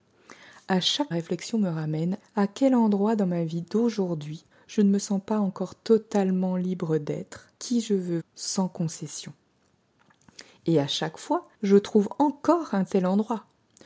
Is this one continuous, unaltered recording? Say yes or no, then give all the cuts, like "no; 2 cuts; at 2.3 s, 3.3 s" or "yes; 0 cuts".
no; 6 cuts; at 1.1 s, 2.2 s, 4.5 s, 7.5 s, 8.2 s, 11.5 s